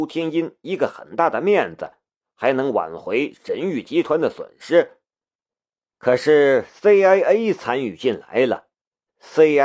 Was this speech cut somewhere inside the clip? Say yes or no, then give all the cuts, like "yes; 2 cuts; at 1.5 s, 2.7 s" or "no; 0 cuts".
no; 0 cuts